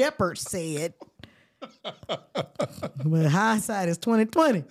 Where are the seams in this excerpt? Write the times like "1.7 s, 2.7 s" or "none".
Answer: none